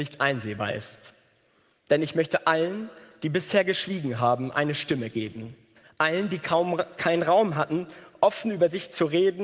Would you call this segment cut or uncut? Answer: uncut